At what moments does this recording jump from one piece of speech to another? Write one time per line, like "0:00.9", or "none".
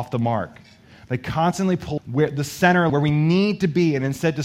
0:02.0
0:02.9